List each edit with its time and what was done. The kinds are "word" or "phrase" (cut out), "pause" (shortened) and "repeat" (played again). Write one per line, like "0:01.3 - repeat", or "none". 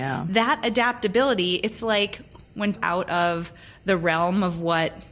0:02.8 - phrase